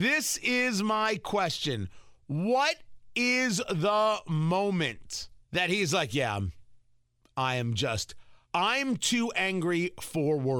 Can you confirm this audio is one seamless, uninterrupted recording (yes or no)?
no